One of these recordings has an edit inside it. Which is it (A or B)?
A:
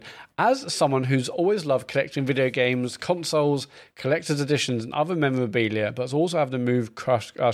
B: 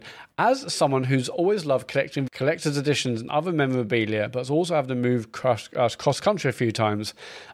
B